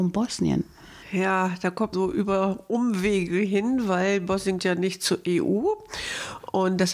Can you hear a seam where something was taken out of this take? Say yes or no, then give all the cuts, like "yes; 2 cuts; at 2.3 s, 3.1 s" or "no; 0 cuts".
yes; 2 cuts; at 1.9 s, 4.6 s